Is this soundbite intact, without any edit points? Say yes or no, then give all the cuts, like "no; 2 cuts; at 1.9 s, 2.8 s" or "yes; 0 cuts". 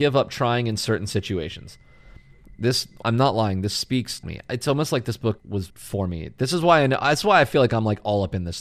no; 4 cuts; at 3.0 s, 4.2 s, 5.4 s, 5.7 s